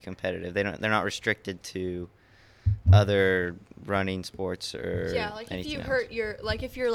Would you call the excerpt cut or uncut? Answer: uncut